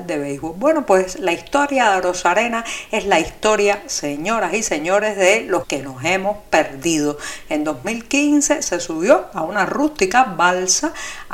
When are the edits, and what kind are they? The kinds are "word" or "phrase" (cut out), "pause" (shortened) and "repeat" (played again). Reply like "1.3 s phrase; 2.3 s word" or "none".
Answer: 5.6 s word